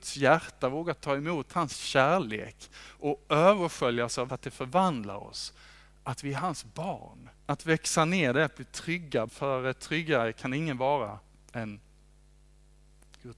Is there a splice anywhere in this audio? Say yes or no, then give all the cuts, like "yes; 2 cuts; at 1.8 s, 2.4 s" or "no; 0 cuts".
yes; 3 cuts; at 4.3 s, 7.4 s, 9.3 s